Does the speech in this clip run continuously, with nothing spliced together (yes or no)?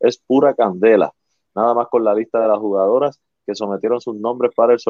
yes